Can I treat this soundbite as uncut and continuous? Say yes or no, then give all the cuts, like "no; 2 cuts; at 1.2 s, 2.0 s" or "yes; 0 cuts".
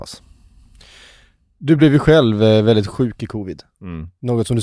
yes; 0 cuts